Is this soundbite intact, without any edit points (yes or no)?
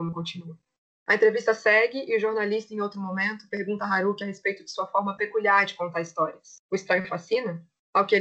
yes